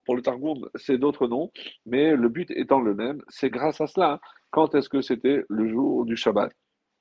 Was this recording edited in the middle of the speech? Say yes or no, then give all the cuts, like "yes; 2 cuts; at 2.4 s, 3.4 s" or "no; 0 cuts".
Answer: yes; 1 cut; at 3.5 s